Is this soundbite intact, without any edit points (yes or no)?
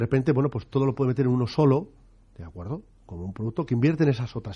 yes